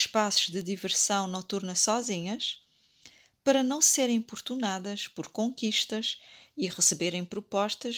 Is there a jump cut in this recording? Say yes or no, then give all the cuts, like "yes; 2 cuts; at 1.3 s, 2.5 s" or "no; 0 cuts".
no; 0 cuts